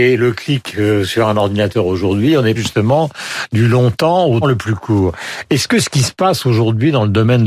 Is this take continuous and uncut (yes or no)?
no